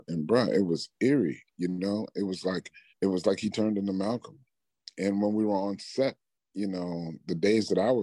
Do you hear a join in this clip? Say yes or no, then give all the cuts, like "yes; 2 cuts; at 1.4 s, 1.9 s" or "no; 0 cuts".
yes; 1 cut; at 2.9 s